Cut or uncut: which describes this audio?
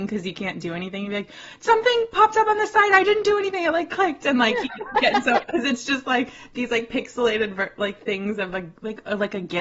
uncut